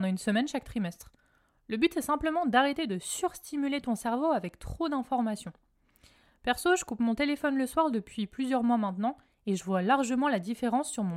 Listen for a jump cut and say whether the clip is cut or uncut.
uncut